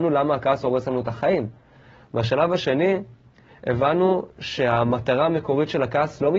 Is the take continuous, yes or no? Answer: yes